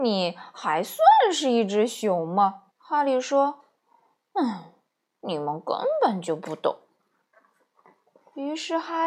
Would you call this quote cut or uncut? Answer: cut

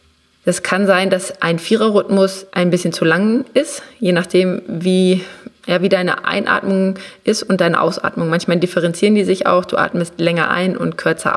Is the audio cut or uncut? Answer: cut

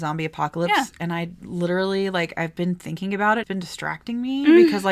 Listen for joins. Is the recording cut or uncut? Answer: cut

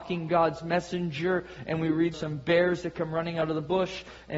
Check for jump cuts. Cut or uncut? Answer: cut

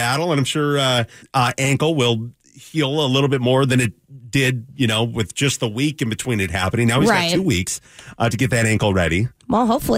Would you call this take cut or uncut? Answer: cut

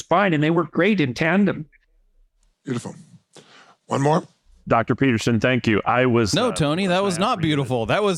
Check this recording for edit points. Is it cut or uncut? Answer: uncut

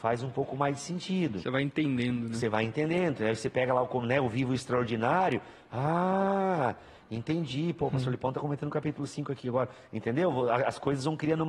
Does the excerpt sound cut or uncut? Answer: uncut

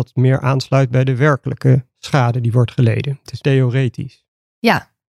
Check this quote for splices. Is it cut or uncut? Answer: cut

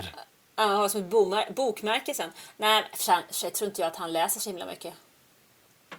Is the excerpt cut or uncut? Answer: uncut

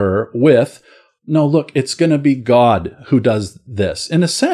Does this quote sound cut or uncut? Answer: uncut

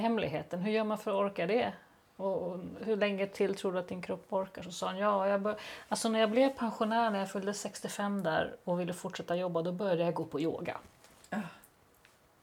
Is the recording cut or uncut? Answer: uncut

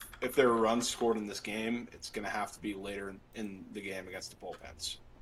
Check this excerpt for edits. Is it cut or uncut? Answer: cut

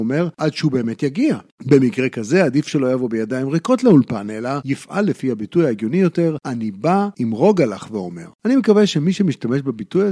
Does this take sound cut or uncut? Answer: cut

